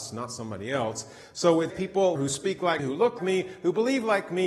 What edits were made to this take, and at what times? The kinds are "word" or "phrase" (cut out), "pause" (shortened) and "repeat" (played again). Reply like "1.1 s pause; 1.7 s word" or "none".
1.7 s word; 2.2 s phrase; 2.8 s word; 3.2 s word